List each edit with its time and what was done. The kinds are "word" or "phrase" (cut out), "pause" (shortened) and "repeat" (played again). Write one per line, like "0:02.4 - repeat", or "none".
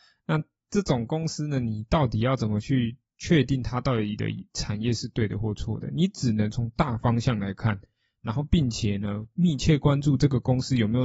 0:03.1 - pause